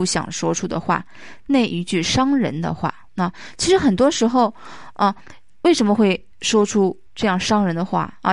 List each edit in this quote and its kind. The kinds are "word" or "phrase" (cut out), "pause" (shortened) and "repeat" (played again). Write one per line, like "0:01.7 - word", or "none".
0:03.1 - pause
0:06.3 - pause
0:07.1 - pause